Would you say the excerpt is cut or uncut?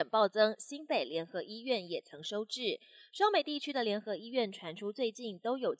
uncut